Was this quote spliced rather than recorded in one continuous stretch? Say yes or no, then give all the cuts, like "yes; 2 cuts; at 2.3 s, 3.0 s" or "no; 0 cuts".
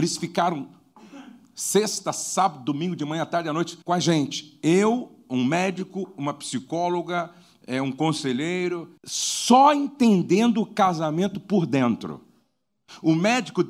yes; 2 cuts; at 3.8 s, 9.0 s